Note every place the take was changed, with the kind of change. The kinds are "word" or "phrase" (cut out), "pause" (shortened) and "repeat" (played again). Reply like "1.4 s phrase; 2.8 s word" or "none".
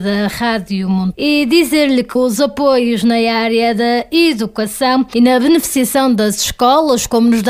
1.1 s word; 2.2 s word

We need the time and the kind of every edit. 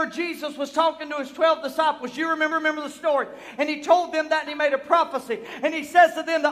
2.5 s repeat; 4.5 s word

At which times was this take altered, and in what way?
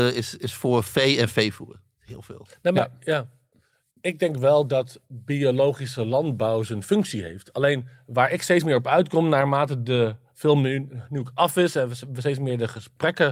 none

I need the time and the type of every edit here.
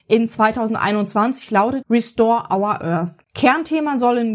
1.8 s word; 3.2 s pause

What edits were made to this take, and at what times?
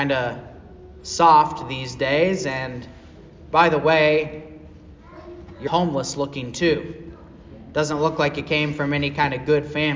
5.7 s phrase

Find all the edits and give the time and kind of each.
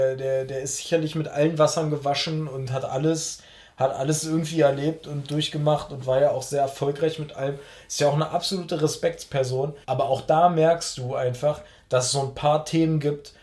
9.8 s pause

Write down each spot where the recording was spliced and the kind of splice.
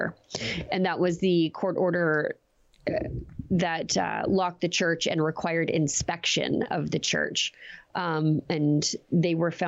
none

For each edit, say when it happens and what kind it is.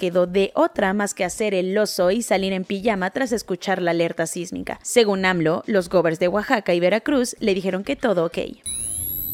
none

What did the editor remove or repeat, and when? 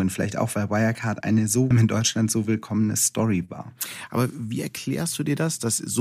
1.2 s word; 1.7 s phrase

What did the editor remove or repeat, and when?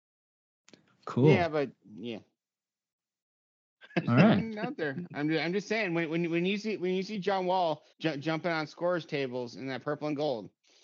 7.9 s pause

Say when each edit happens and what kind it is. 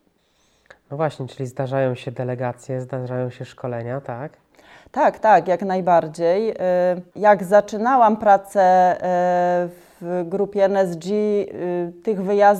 7.1 s pause

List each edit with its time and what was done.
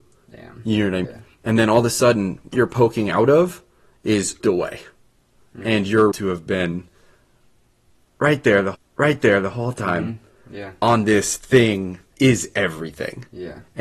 1.0 s word; 2.5 s word; 4.4 s word; 6.1 s word; 8.7 s repeat; 12.1 s word

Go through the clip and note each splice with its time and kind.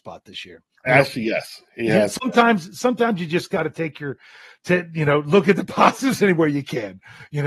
none

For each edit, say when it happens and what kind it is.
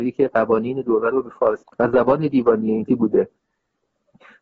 1.1 s word; 1.6 s word; 2.9 s word

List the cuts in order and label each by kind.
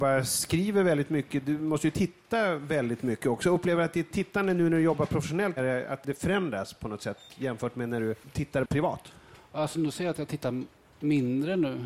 5.6 s word

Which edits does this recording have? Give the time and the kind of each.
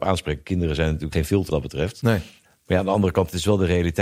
1.1 s word; 1.5 s word

